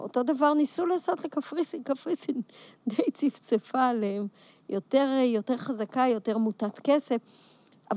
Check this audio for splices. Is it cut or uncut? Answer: uncut